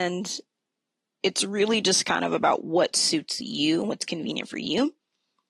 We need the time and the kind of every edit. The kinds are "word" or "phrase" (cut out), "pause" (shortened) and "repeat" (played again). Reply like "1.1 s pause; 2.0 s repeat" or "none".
none